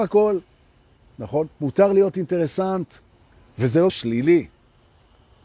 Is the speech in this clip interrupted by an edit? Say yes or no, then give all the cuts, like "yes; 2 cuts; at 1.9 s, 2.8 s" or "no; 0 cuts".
yes; 2 cuts; at 3.1 s, 3.9 s